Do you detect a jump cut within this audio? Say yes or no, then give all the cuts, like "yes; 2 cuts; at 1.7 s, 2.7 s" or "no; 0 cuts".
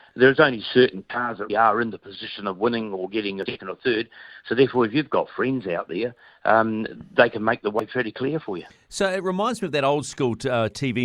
yes; 2 cuts; at 1.5 s, 3.5 s